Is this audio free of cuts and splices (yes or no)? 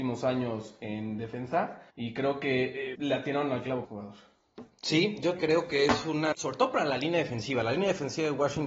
no